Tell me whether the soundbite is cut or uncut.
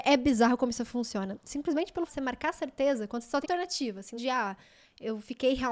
cut